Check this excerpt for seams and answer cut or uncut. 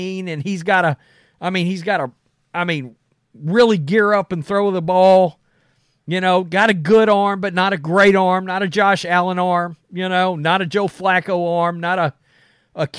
uncut